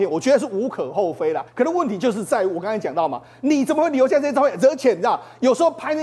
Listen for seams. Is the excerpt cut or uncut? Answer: cut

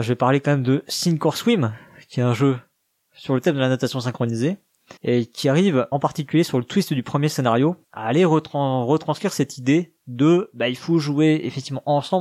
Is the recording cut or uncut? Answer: cut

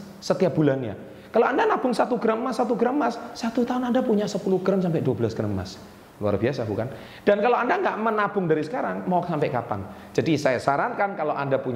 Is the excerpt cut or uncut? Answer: uncut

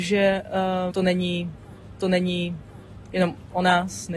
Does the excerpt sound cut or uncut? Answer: cut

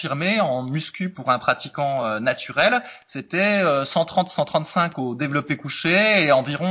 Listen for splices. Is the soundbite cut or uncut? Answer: uncut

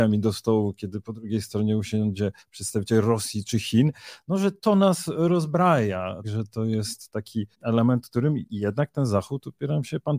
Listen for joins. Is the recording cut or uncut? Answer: cut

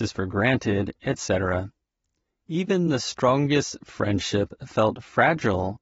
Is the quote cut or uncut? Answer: uncut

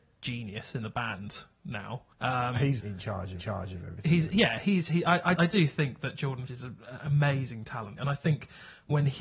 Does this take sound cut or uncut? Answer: cut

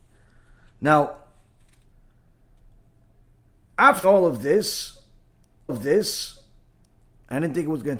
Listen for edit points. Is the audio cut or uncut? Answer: cut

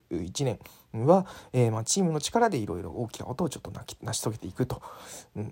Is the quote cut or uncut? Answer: uncut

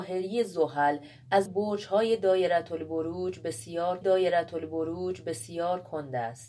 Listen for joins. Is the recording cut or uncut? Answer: cut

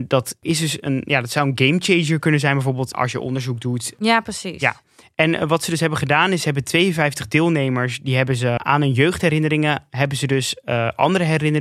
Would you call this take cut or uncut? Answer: uncut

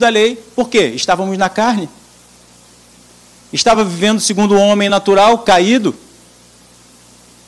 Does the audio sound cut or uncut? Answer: uncut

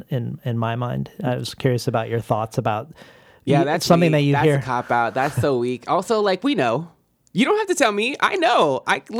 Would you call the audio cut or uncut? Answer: uncut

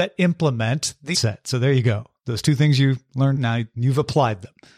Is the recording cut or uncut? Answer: cut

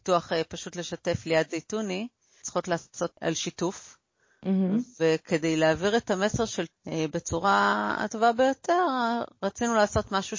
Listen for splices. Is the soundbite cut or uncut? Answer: cut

